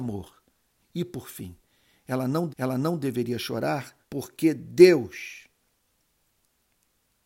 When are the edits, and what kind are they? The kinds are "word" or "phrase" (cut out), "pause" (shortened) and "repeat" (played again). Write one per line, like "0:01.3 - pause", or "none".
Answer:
0:02.5 - repeat
0:04.0 - pause